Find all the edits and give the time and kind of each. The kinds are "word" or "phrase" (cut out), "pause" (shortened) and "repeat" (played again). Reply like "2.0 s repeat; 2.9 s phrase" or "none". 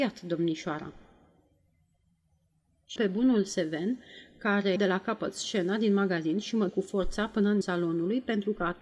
3.0 s word; 4.8 s word; 6.7 s word; 7.6 s word